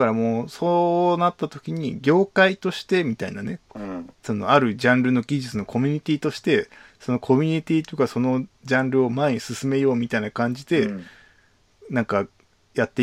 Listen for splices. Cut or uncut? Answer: uncut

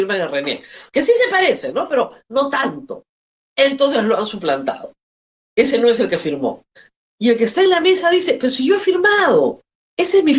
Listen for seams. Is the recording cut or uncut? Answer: uncut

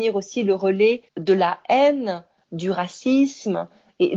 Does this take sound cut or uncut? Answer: uncut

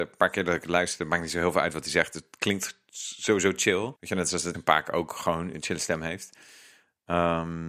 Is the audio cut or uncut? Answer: cut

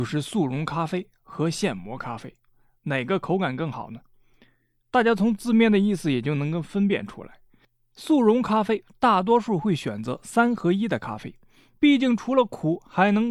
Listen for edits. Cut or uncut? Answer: uncut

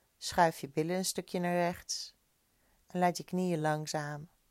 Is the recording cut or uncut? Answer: uncut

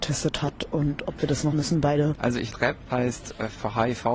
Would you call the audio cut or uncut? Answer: cut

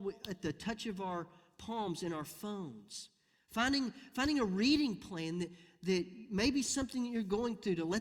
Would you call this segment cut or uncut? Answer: uncut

